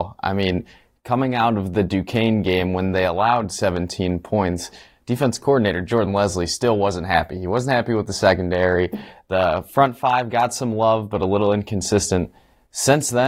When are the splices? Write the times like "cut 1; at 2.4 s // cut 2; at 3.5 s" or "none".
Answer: none